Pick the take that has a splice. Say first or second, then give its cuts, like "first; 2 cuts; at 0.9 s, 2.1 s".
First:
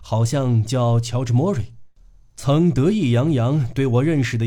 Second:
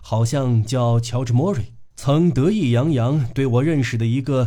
second; 1 cut; at 1.9 s